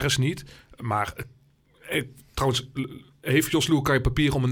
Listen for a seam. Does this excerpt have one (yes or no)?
no